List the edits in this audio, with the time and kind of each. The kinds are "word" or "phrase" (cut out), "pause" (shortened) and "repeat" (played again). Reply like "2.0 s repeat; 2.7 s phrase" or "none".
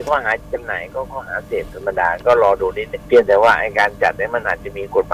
3.0 s pause

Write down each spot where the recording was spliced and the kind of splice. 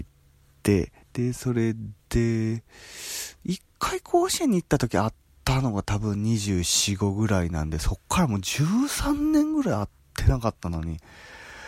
1.0 s pause; 2.0 s pause; 5.3 s pause

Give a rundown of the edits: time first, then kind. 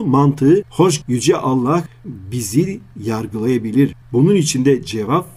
1.0 s word

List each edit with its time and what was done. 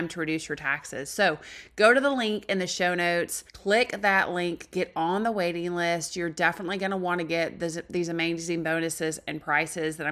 3.5 s pause

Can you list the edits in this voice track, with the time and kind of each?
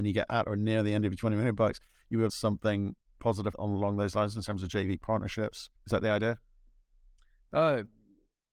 2.3 s phrase; 3.5 s word; 5.8 s pause

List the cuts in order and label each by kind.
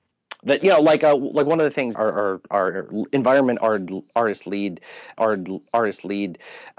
1.9 s phrase; 5.2 s repeat

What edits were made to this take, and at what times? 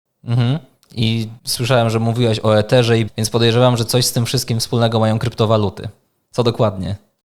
1.4 s pause; 3.1 s word

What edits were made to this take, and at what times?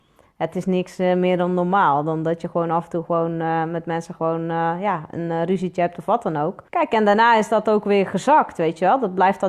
6.7 s pause

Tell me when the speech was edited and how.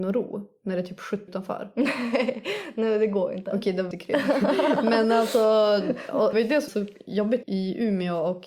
1.3 s word; 3.9 s word; 6.3 s word; 6.7 s word; 7.4 s word

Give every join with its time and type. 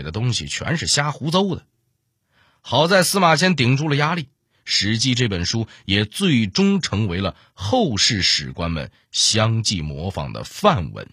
none

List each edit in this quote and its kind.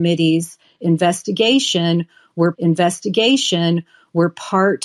2.5 s repeat

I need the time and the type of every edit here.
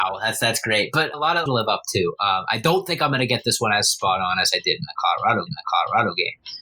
1.1 s word; 1.5 s phrase; 5.5 s repeat

